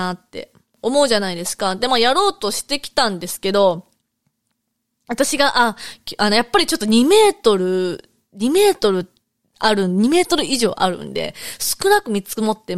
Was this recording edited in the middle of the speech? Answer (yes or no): no